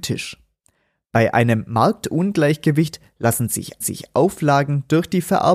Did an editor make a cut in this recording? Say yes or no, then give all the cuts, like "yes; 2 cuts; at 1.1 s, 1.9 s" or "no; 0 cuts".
yes; 1 cut; at 3.8 s